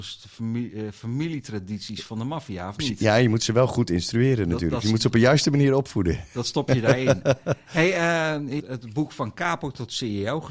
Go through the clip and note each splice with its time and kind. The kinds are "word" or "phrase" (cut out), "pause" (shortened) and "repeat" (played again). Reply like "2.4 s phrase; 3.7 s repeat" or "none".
8.6 s phrase